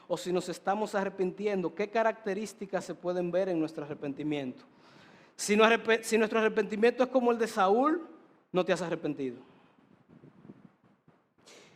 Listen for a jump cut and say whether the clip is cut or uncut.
uncut